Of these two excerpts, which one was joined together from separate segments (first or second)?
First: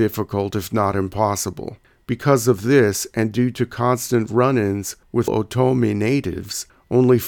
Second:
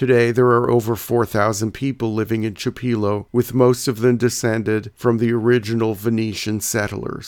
first